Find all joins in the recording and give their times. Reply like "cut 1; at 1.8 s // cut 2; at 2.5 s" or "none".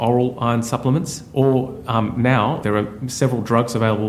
cut 1; at 2.6 s